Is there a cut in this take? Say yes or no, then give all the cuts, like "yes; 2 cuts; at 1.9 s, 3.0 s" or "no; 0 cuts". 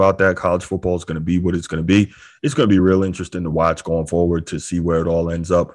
no; 0 cuts